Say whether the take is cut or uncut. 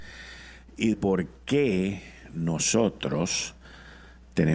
cut